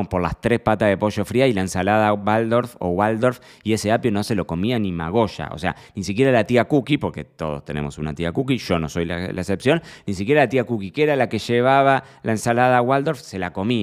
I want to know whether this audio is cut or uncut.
uncut